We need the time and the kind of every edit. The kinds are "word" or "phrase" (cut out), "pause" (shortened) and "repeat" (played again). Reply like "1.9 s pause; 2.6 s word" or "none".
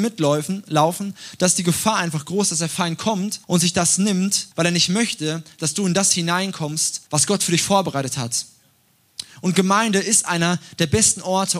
3.4 s pause; 4.5 s pause; 7.1 s pause